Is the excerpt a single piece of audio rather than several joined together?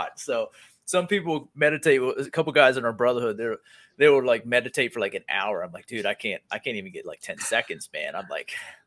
yes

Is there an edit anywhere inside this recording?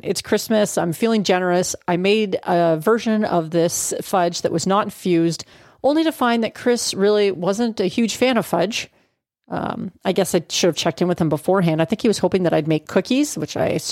no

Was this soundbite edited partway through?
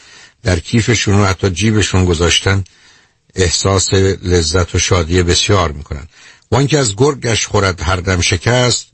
no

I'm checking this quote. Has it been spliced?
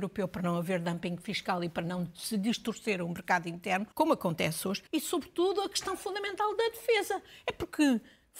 yes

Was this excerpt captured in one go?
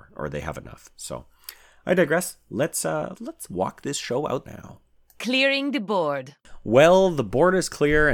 no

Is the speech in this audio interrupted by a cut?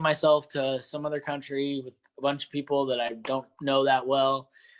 no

